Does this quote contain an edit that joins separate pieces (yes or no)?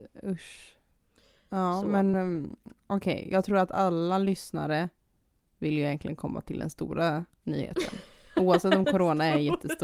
no